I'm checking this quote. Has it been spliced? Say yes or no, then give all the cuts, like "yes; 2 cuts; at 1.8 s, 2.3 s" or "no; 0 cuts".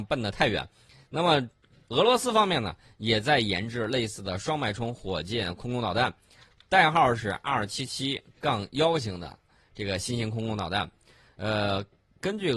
no; 0 cuts